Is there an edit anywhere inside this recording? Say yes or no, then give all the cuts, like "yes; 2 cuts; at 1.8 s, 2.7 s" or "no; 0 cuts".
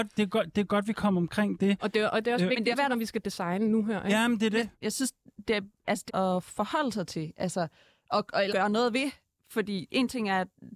yes; 4 cuts; at 2.7 s, 4.7 s, 6.1 s, 8.5 s